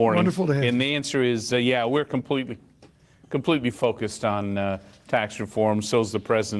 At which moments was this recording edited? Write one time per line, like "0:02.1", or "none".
none